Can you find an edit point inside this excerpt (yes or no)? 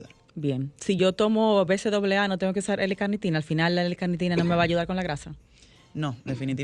no